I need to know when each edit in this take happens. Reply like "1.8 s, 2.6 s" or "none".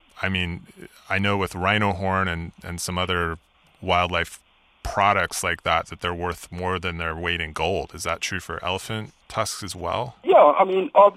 none

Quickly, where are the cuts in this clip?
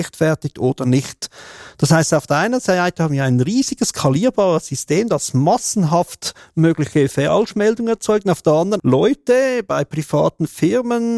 8.8 s

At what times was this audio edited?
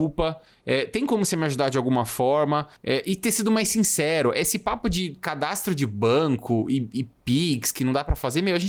2.8 s

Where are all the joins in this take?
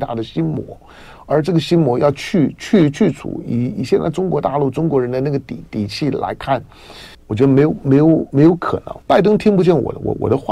7.1 s, 9.0 s

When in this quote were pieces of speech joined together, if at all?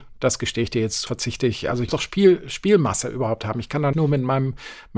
1.1 s, 1.9 s, 3.9 s

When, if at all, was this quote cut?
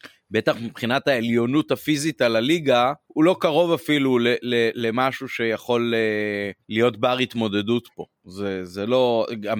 3.0 s, 6.6 s, 8.1 s

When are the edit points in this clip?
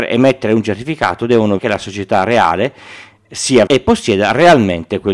1.6 s, 3.7 s

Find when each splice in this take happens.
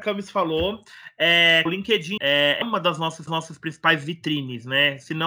1.7 s, 2.2 s, 2.6 s, 3.3 s

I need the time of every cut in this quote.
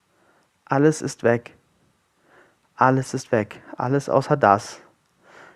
none

